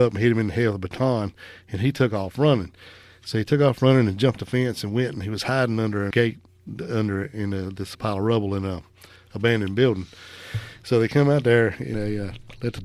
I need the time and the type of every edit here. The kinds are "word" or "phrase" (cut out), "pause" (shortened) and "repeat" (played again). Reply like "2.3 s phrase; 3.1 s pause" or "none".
6.1 s word; 7.9 s word; 11.9 s word